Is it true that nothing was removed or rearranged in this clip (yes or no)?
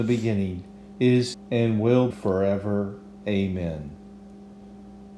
no